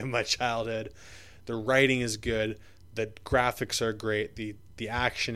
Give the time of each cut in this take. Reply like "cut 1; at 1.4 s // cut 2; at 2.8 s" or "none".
none